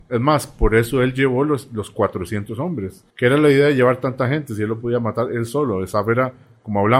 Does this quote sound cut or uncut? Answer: cut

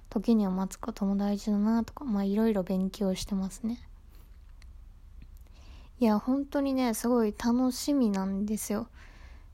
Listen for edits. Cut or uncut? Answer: uncut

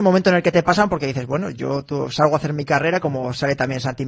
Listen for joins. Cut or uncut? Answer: uncut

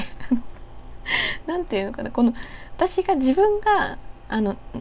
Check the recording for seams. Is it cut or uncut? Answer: uncut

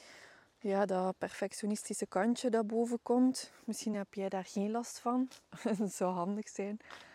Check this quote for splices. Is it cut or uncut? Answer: uncut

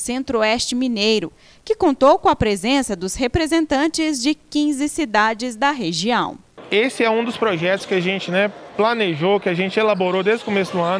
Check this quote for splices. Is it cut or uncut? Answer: uncut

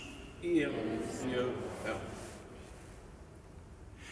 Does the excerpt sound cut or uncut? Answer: cut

